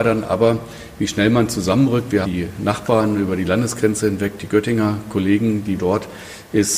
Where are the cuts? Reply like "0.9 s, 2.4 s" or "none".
2.2 s, 5.8 s